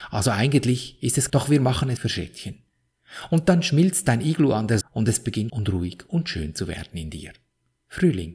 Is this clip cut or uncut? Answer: cut